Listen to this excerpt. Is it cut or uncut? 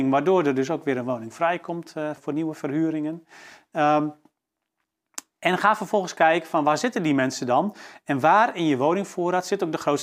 cut